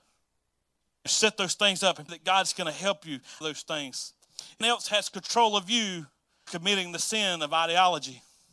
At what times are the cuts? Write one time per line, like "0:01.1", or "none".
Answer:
0:01.1
0:02.1
0:03.4
0:04.6
0:06.5

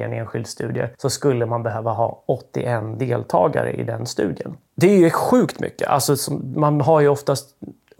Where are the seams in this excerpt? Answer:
0:00.9

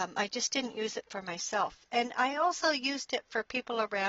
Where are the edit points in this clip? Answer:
none

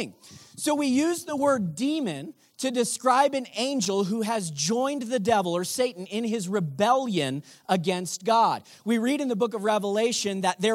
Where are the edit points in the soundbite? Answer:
none

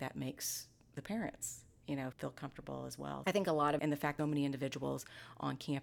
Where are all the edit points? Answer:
0:02.1
0:03.2
0:03.8
0:04.2

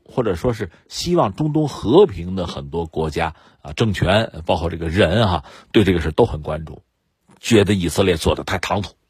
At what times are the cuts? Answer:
none

